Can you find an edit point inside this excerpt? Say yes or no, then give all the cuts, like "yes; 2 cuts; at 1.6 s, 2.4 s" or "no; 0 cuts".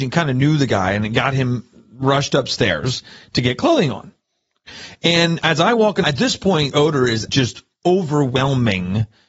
yes; 3 cuts; at 6.0 s, 6.7 s, 7.3 s